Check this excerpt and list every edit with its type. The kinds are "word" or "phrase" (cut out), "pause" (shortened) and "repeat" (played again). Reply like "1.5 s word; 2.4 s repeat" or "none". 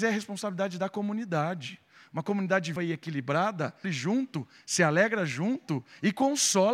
2.8 s word; 3.8 s word